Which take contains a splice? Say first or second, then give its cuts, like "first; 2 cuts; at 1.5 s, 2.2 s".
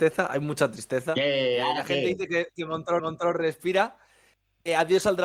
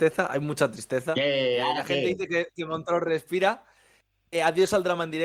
first; 1 cut; at 3.0 s